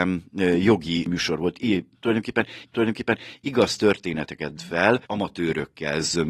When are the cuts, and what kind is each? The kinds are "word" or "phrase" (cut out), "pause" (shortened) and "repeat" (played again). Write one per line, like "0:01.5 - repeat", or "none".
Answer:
0:02.6 - repeat
0:04.6 - word
0:05.0 - pause